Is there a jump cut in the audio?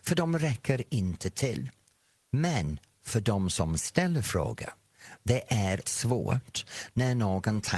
yes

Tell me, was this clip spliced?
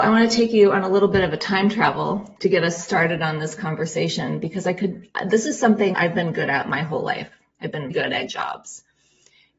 yes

